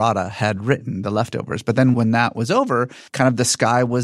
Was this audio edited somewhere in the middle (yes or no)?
yes